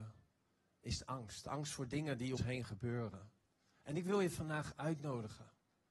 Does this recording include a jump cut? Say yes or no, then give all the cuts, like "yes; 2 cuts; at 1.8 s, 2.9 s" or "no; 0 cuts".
yes; 1 cut; at 2.4 s